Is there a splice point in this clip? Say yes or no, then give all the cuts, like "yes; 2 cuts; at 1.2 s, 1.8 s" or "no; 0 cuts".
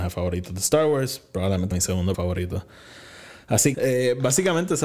yes; 3 cuts; at 1.7 s, 2.1 s, 3.7 s